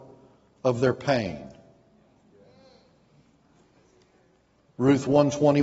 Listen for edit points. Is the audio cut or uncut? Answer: uncut